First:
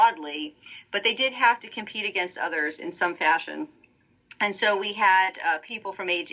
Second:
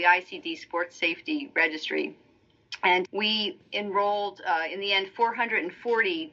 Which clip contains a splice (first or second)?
second